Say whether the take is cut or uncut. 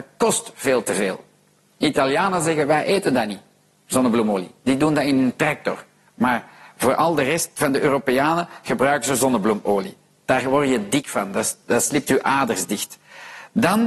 uncut